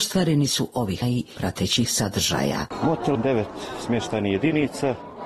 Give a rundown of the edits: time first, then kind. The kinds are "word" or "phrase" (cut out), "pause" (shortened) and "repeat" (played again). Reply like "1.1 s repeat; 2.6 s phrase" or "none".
1.0 s phrase; 3.1 s word

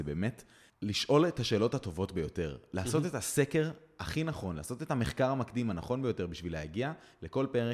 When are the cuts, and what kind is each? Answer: none

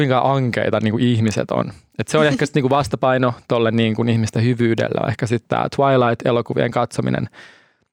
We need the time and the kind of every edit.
none

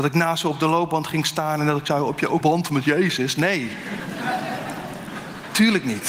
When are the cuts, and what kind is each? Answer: 2.4 s word

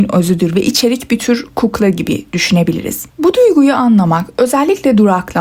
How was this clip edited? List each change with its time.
3.1 s pause

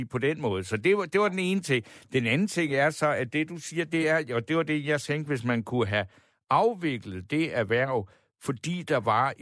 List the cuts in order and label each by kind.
none

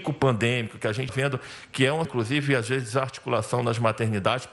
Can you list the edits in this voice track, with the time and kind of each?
1.1 s word; 2.0 s word

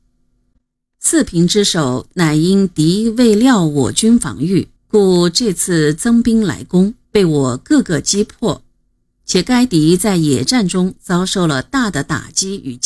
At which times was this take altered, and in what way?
4.8 s pause; 7.0 s pause

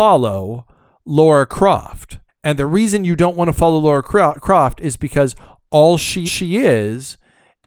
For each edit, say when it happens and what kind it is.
2.3 s pause; 6.3 s repeat

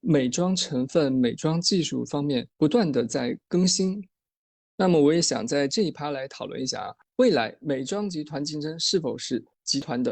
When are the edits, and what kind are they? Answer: none

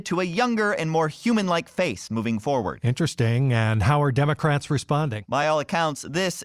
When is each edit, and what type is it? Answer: none

